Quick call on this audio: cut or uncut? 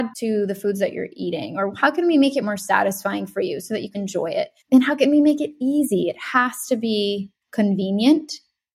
cut